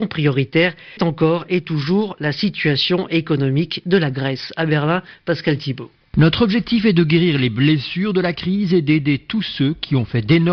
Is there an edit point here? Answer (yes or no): yes